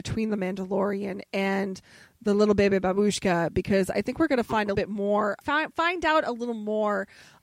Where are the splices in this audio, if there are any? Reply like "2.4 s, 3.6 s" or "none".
4.7 s, 5.4 s